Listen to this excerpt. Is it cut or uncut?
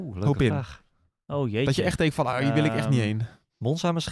uncut